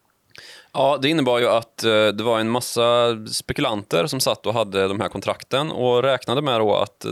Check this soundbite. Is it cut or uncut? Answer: uncut